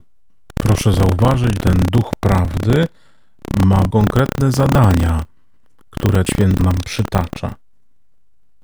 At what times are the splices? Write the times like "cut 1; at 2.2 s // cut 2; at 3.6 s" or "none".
cut 1; at 1.6 s // cut 2; at 3.9 s // cut 3; at 6.3 s // cut 4; at 6.6 s